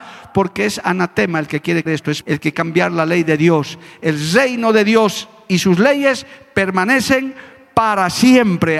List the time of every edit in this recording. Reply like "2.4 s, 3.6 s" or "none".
1.9 s, 2.2 s, 2.5 s